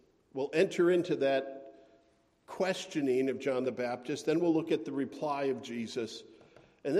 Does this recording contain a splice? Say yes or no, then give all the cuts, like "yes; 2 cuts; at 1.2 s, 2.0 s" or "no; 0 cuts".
no; 0 cuts